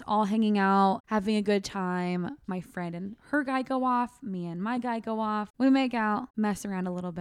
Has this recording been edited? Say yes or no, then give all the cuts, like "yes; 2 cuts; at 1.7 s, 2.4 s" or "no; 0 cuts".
no; 0 cuts